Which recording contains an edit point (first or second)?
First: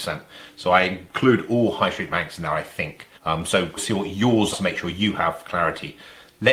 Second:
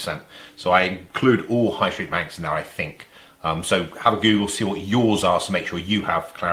first